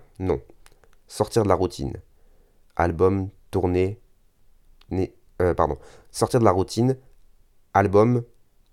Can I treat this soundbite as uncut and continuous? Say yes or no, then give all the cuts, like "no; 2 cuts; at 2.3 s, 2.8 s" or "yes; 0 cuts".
yes; 0 cuts